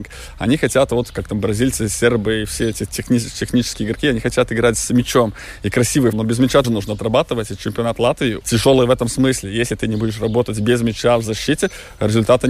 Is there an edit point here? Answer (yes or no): yes